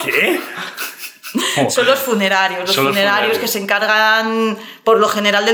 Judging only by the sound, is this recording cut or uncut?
uncut